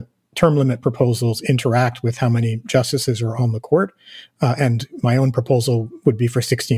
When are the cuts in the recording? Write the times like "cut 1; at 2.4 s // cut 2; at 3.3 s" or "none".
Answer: none